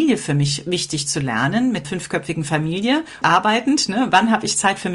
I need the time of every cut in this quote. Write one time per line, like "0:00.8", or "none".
0:01.8
0:03.2

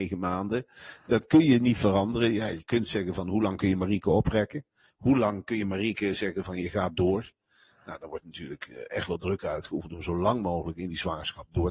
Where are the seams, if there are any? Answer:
none

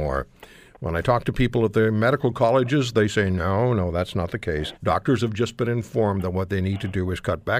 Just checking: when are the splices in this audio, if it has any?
0:04.8

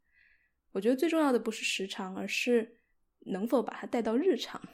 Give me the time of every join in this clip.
none

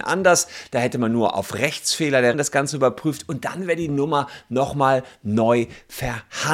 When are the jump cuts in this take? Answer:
0:02.3

